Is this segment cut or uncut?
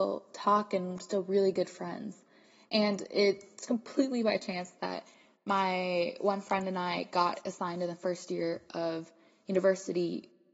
uncut